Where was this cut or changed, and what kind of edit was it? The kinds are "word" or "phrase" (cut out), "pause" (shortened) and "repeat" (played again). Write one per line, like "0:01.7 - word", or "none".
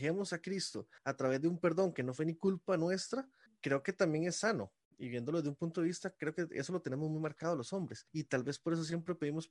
0:01.0 - pause
0:03.5 - pause
0:08.1 - pause